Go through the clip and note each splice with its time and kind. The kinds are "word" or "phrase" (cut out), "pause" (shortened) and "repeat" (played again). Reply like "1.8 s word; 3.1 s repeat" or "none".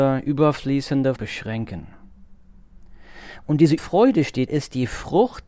1.2 s word; 3.8 s word; 4.5 s word